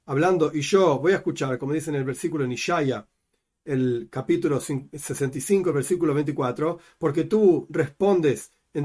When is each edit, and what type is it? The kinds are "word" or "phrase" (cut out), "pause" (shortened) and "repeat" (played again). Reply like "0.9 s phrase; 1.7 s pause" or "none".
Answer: none